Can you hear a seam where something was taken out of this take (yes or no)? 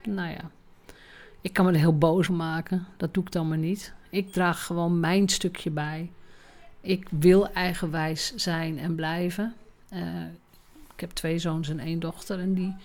yes